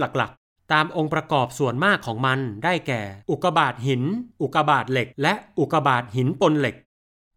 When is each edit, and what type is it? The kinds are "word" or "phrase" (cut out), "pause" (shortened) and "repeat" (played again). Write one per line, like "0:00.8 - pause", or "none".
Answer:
0:03.2 - pause
0:04.3 - pause
0:05.1 - pause

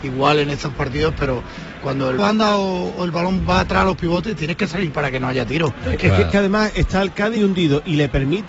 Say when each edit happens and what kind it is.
0:02.2 - phrase
0:06.3 - phrase
0:07.4 - word

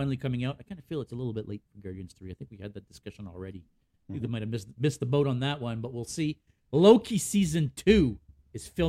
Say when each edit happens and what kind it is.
none

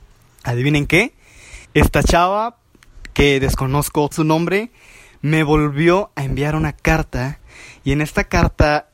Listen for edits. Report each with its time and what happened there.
0:01.6 - pause
0:04.1 - word

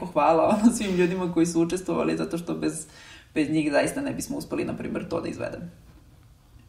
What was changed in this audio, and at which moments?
none

